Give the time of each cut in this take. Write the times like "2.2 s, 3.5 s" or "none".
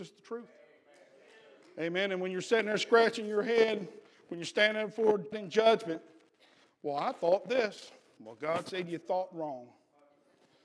5.3 s